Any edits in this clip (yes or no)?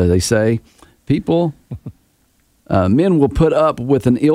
no